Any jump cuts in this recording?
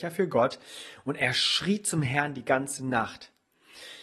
no; 0 cuts

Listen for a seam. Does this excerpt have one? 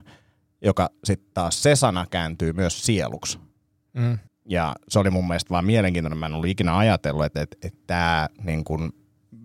yes; 1 cut; at 4.3 s

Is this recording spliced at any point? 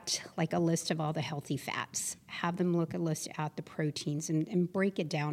no; 0 cuts

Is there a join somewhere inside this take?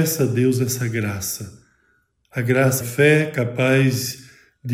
yes; 1 cut; at 2.8 s

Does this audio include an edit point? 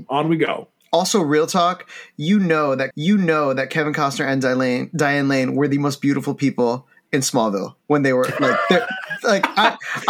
yes; 2 cuts; at 2.9 s, 7.8 s

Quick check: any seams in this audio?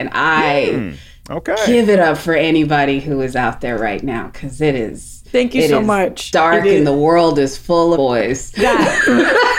yes; 1 cut; at 7.9 s

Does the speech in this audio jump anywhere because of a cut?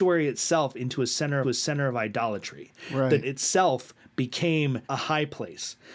yes; 3 cuts; at 1.4 s, 3.2 s, 4.8 s

